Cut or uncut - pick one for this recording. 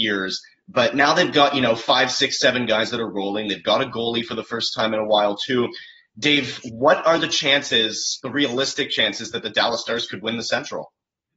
uncut